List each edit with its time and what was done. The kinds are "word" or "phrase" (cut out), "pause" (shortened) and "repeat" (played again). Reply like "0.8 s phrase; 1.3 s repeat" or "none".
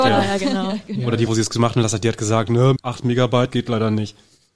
1.3 s word; 2.8 s word; 3.5 s word

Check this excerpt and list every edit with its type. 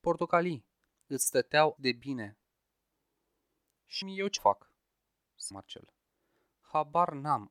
1.8 s word; 4.0 s word; 4.4 s word; 5.5 s word

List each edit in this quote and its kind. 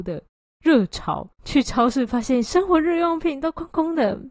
1.3 s pause

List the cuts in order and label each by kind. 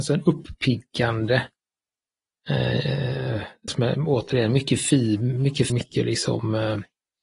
3.7 s word; 5.7 s word

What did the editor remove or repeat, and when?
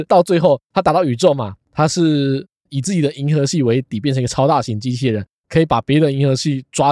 none

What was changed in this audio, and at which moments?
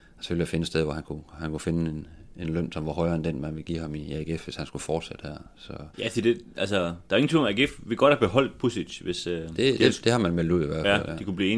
5.9 s pause

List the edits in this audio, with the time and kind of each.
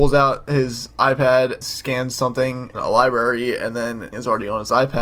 1.6 s word; 2.7 s word; 4.1 s word

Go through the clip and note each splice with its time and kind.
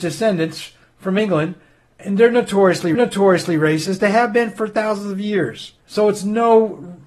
2.9 s repeat; 5.8 s pause

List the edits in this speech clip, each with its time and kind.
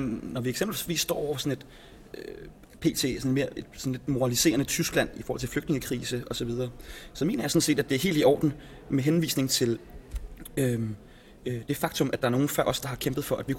none

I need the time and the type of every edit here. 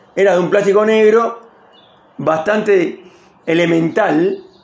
none

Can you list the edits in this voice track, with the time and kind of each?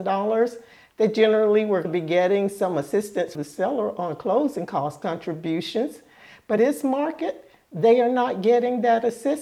1.8 s word; 3.3 s word; 6.6 s word

